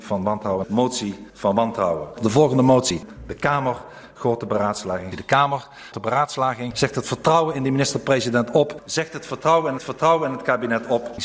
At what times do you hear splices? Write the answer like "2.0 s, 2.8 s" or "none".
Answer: 1.3 s, 5.9 s, 9.8 s